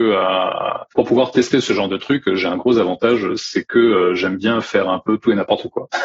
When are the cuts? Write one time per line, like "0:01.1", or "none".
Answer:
none